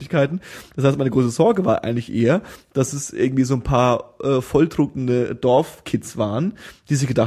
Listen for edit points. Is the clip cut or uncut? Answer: uncut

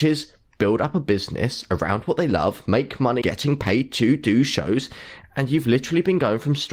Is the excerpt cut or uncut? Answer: cut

